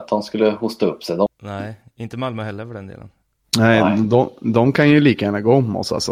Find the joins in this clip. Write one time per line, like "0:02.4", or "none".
0:01.3
0:03.4